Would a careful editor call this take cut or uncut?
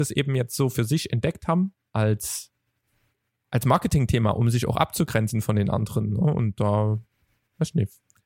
uncut